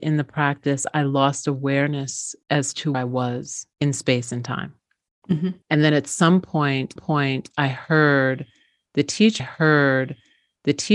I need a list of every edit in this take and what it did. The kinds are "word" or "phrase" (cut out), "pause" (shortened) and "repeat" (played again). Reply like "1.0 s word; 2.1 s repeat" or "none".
2.4 s pause; 2.9 s word; 3.7 s pause; 5.6 s pause; 7.0 s repeat; 9.4 s repeat